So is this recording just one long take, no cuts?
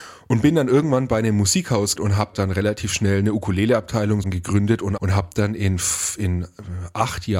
no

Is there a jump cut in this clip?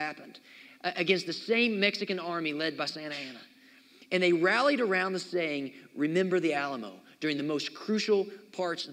no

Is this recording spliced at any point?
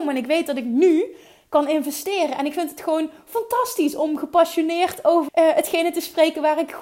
yes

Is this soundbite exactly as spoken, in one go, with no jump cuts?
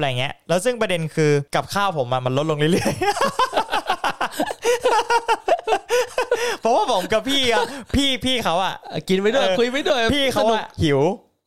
no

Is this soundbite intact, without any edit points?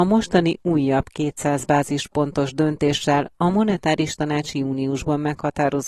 yes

